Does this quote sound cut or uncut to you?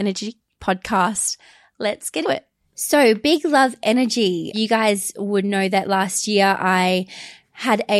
cut